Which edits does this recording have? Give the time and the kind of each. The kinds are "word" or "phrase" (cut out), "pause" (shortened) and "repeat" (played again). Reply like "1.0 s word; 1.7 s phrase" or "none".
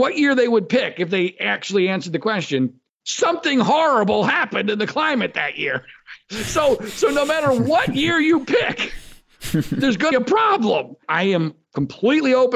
10.1 s phrase; 11.0 s pause